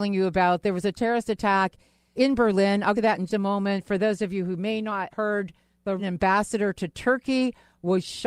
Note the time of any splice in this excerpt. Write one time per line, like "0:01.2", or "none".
0:02.2
0:03.0
0:03.3
0:05.1
0:06.0